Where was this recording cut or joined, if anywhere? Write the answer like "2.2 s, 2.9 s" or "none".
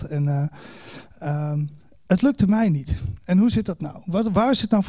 none